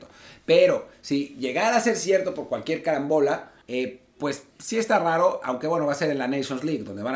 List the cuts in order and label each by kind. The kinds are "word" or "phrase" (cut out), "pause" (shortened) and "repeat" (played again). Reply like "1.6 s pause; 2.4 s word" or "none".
3.6 s pause; 4.5 s pause